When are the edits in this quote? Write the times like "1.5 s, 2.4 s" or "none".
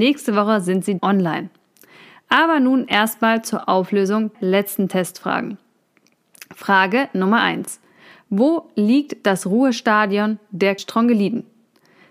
1.0 s, 4.3 s, 10.8 s

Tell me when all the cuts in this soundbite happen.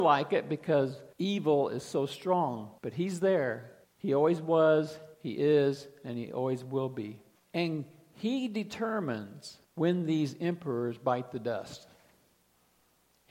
1.1 s, 2.8 s, 3.8 s, 5.1 s, 7.4 s, 9.6 s

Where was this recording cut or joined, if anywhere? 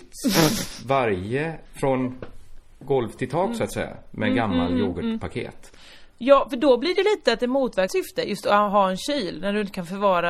1.7 s, 7.9 s

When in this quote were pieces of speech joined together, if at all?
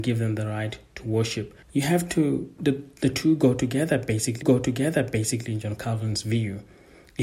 1.6 s, 2.6 s, 4.4 s

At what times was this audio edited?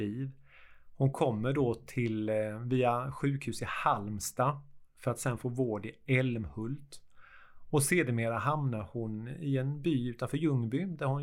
none

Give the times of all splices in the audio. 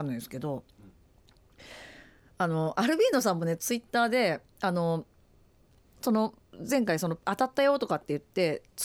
none

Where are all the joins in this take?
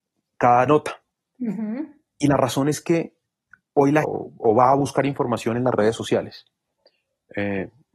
4.0 s

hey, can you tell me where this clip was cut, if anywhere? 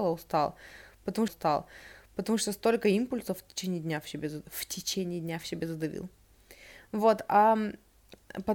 1.3 s

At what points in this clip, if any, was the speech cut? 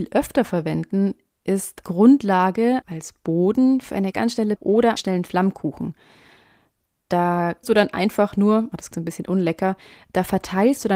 1.8 s, 2.8 s, 4.1 s, 4.6 s, 5.0 s, 7.6 s, 8.9 s

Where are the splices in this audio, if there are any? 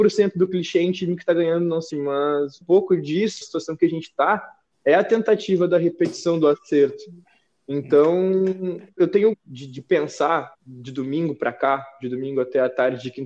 1.9 s, 2.6 s, 3.4 s, 9.0 s, 9.3 s, 10.5 s

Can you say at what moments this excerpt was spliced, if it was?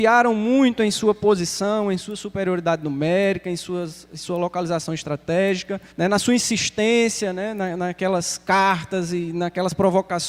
5.9 s

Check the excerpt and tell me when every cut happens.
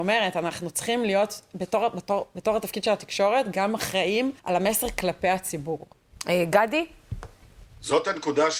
4.4 s

